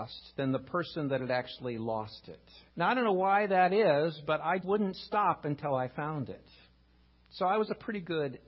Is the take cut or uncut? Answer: cut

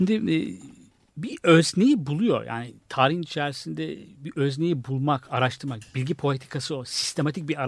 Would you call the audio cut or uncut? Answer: uncut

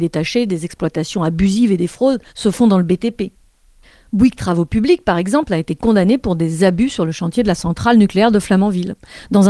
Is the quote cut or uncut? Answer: cut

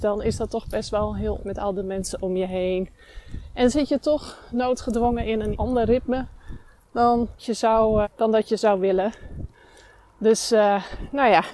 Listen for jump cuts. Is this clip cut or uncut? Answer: cut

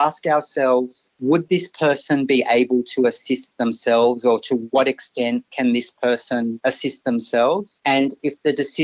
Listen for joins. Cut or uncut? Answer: uncut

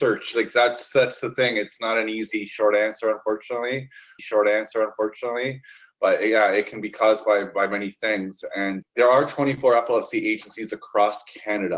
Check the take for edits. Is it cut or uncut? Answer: cut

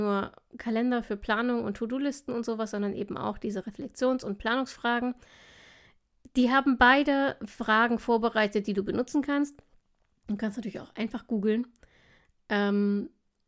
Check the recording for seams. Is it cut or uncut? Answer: uncut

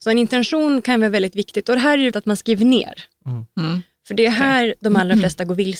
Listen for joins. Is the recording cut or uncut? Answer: cut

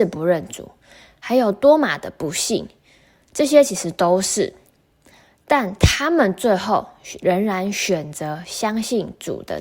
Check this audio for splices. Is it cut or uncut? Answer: uncut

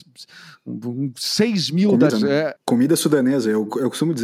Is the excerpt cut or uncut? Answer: cut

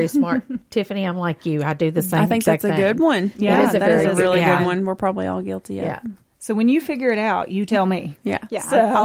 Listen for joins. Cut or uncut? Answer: uncut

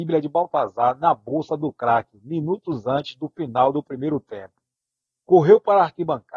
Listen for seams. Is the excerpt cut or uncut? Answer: cut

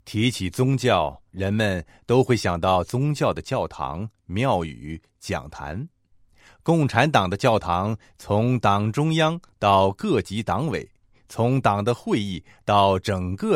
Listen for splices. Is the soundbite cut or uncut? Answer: cut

